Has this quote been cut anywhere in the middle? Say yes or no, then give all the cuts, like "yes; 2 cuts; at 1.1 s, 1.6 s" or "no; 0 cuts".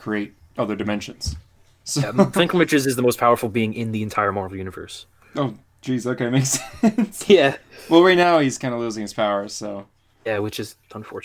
no; 0 cuts